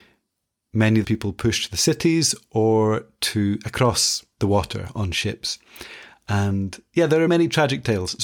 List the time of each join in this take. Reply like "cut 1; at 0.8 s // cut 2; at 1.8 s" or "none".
cut 1; at 1.0 s // cut 2; at 4.3 s // cut 3; at 7.3 s